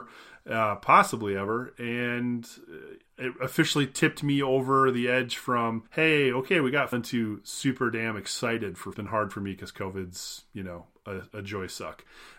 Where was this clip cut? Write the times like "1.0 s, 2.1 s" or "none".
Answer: 3.0 s, 5.9 s, 6.9 s, 8.9 s